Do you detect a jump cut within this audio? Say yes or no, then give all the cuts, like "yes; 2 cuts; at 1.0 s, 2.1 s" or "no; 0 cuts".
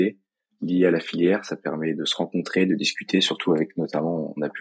no; 0 cuts